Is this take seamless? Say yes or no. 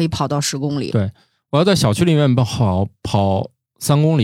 yes